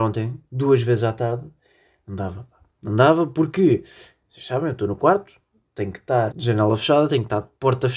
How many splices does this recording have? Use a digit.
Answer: 1